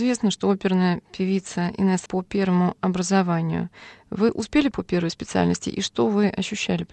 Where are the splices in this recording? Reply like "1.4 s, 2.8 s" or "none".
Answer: 2.1 s, 4.7 s